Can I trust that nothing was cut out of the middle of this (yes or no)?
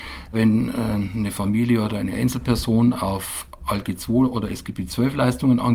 yes